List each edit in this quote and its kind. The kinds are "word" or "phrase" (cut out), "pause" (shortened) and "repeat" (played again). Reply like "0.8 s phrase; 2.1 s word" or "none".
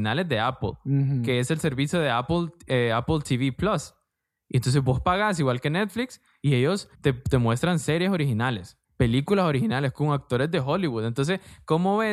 6.9 s pause; 8.9 s pause